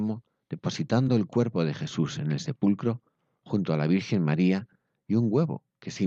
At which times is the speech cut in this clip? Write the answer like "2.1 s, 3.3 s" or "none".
none